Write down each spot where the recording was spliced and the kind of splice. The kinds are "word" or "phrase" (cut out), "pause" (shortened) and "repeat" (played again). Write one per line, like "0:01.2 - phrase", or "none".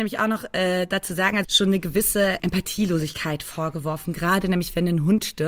0:01.4 - phrase
0:02.4 - word